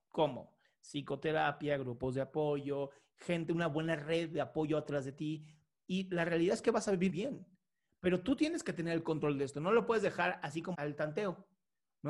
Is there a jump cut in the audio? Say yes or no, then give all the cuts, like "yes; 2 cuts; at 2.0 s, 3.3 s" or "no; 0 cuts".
yes; 2 cuts; at 7.1 s, 10.7 s